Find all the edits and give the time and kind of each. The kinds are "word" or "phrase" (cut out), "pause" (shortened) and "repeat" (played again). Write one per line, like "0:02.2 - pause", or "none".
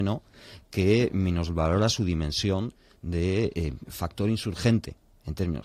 0:03.9 - word